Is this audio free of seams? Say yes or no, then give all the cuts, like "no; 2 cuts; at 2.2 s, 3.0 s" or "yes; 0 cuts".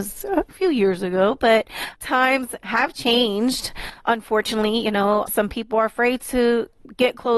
no; 2 cuts; at 2.0 s, 5.3 s